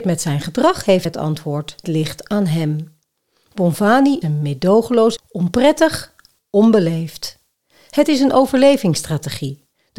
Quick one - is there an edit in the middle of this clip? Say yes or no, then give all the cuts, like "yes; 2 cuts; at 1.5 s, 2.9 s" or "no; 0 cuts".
yes; 5 cuts; at 1.1 s, 1.8 s, 4.2 s, 5.2 s, 6.4 s